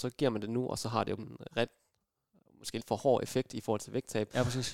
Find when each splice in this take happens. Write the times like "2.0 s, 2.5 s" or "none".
1.2 s, 2.8 s